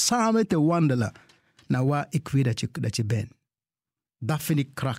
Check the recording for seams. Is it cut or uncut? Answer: uncut